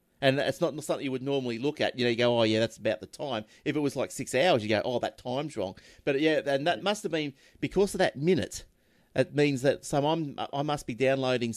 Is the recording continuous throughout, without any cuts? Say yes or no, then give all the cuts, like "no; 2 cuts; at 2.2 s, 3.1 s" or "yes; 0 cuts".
yes; 0 cuts